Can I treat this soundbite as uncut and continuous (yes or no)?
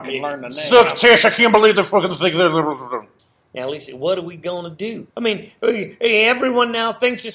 no